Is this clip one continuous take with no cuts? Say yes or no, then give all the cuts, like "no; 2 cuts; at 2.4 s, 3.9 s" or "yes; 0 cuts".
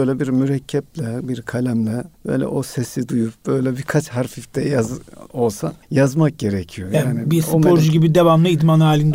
no; 3 cuts; at 2.1 s, 3.4 s, 5.8 s